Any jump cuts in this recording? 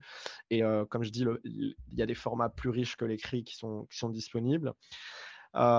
no; 0 cuts

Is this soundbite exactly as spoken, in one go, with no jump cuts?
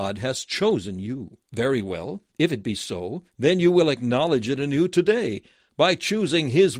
no; 3 cuts; at 1.4 s, 2.3 s, 3.3 s

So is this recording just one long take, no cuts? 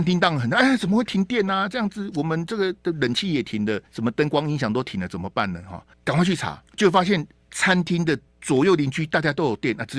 no; 4 cuts; at 3.9 s, 5.9 s, 6.7 s, 8.3 s

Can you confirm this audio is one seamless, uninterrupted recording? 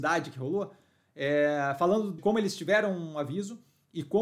no; 1 cut; at 2.2 s

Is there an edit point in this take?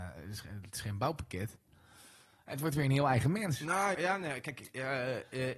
yes; 1 cut; at 3.9 s

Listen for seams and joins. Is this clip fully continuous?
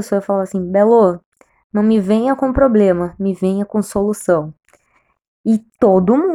yes; 0 cuts

